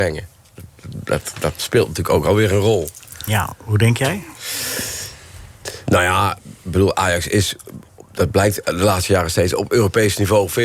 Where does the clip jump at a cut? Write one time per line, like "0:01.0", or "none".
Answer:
none